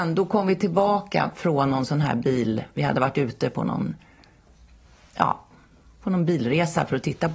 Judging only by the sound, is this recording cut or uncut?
uncut